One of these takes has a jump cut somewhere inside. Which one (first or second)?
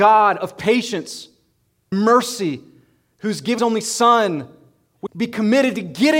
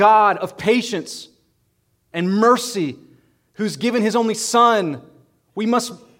first